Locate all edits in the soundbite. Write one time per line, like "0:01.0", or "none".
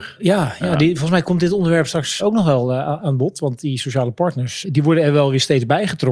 0:01.2
0:02.2
0:04.6

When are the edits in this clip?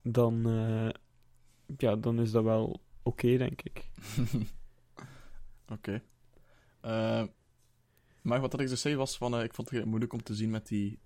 none

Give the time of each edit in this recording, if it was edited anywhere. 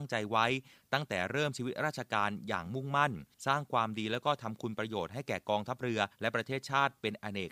0:03.3
0:06.1

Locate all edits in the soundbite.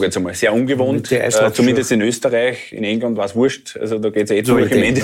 none

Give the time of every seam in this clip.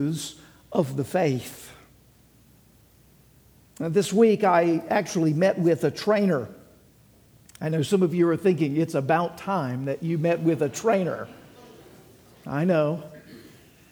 none

